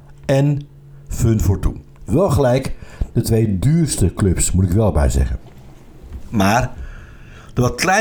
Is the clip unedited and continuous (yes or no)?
yes